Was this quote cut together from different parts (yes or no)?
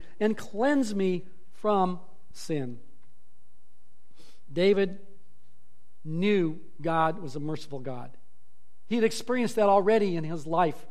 yes